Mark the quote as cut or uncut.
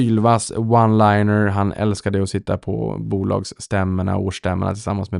uncut